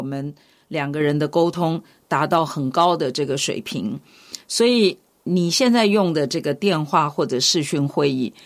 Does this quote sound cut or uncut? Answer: cut